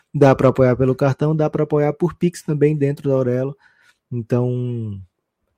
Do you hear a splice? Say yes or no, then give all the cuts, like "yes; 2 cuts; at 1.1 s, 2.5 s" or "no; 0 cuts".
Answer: no; 0 cuts